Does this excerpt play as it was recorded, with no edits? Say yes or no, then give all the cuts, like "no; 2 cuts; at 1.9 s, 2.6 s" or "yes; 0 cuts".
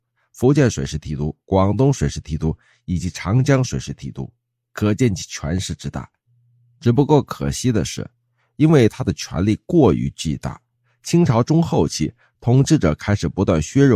yes; 0 cuts